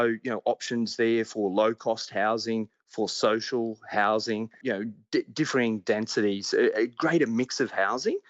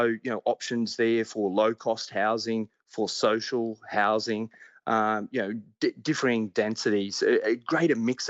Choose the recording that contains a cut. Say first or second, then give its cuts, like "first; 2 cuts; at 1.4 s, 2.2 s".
first; 1 cut; at 4.6 s